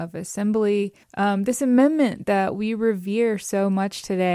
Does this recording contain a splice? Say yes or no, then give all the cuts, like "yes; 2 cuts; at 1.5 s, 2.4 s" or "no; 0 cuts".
yes; 1 cut; at 1.0 s